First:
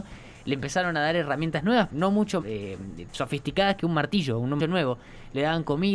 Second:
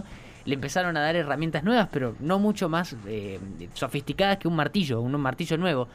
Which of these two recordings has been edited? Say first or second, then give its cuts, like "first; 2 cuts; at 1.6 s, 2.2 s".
first; 3 cuts; at 1.9 s, 2.4 s, 4.6 s